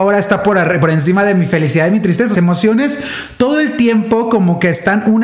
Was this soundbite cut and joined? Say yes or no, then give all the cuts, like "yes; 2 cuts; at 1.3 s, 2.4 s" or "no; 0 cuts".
yes; 1 cut; at 2.3 s